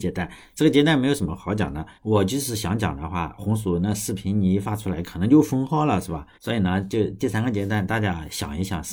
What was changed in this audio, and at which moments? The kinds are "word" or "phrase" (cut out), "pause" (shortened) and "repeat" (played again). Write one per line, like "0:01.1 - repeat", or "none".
0:01.9 - pause
0:06.3 - pause